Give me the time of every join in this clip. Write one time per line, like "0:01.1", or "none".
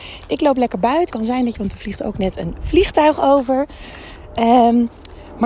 0:01.1
0:01.5